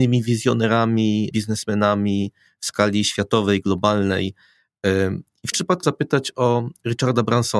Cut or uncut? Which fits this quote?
cut